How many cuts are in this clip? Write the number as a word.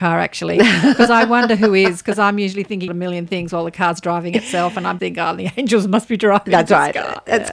two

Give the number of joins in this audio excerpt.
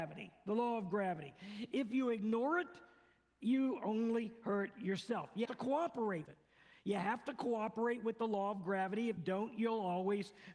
three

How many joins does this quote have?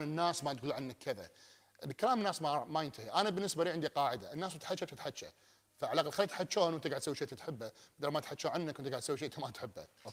zero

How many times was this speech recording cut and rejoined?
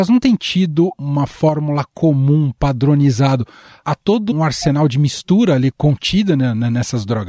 one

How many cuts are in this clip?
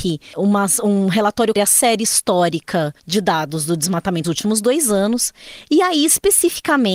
three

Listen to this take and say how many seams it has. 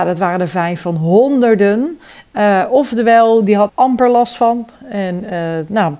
one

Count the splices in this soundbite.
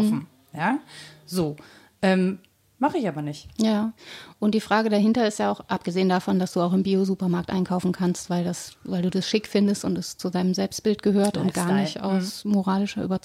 zero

